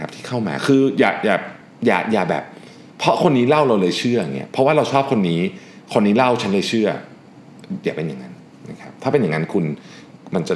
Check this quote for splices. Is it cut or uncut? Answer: uncut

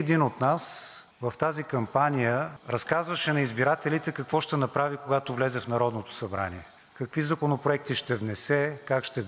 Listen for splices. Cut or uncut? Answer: uncut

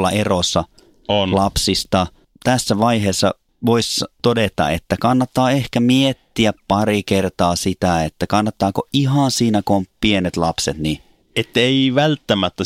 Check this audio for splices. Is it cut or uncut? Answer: uncut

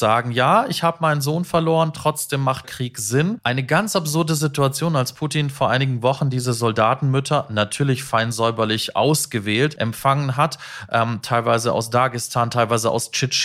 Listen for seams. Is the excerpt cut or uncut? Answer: cut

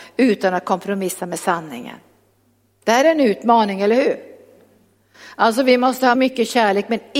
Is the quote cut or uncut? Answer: cut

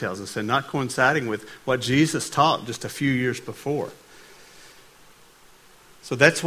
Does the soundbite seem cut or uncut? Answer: uncut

